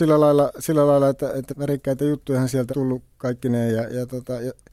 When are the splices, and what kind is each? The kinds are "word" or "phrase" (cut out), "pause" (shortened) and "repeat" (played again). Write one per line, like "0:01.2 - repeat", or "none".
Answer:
0:01.5 - word
0:02.7 - word